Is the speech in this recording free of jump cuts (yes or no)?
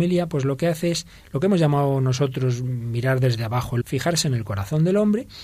no